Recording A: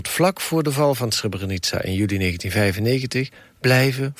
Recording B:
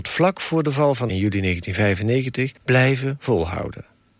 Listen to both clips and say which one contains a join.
B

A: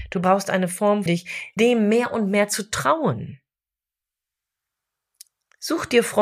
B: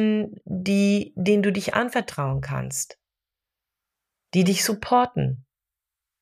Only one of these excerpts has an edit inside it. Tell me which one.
A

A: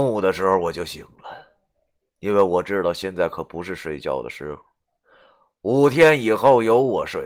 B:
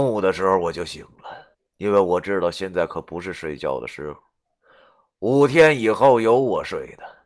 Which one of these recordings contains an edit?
B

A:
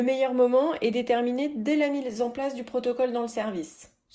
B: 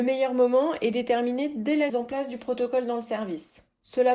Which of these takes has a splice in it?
B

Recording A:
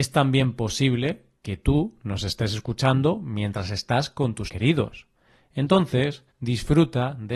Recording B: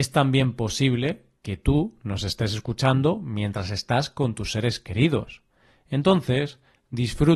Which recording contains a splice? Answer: A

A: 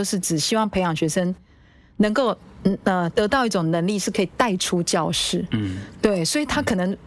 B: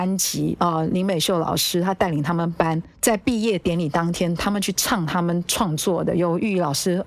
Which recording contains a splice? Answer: B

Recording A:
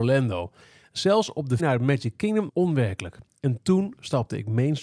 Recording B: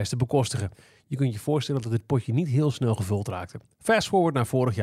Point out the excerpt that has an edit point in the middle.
A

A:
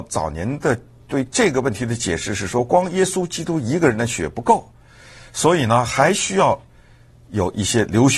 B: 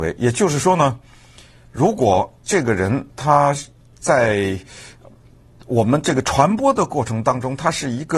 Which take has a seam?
B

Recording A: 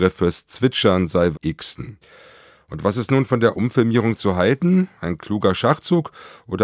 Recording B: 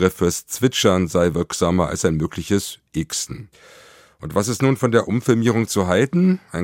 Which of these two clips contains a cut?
A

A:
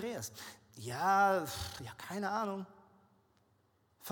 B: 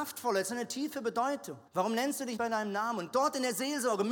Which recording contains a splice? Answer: B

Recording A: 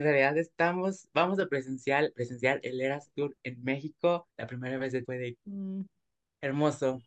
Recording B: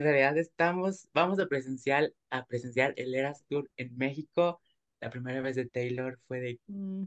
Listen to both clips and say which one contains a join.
A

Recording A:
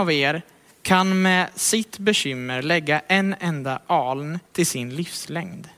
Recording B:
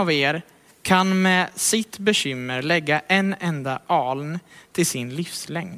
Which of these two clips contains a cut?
A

